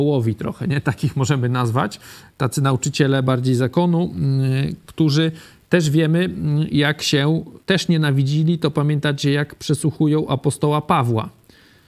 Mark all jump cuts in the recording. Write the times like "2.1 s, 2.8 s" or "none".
7.6 s

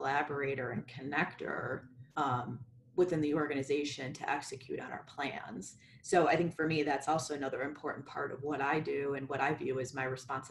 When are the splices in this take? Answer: 2.1 s

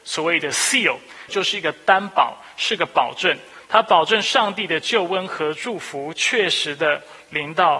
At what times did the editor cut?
1.3 s

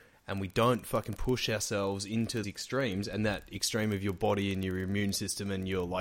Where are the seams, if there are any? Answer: 2.4 s

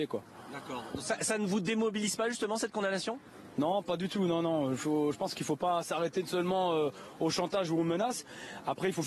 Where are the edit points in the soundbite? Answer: none

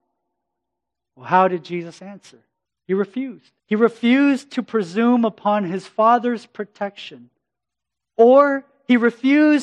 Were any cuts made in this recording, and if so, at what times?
2.6 s, 3.6 s

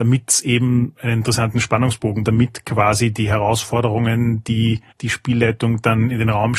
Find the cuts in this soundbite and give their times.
2.2 s, 4.9 s

